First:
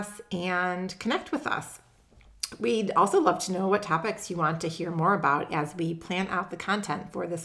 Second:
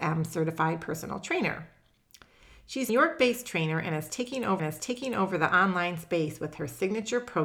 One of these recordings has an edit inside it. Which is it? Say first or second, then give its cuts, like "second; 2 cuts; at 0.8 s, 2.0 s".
second; 2 cuts; at 2.9 s, 4.6 s